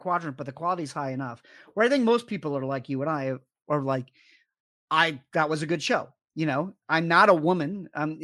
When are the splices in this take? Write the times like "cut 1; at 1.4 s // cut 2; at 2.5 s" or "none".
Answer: none

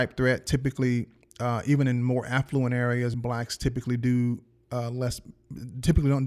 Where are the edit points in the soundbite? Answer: none

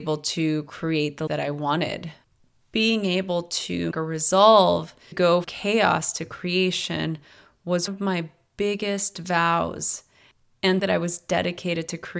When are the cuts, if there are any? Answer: cut 1; at 1.3 s // cut 2; at 3.9 s // cut 3; at 5.1 s // cut 4; at 5.4 s // cut 5; at 7.9 s // cut 6; at 10.8 s

